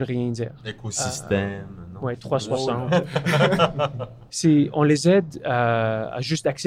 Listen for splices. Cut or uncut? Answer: uncut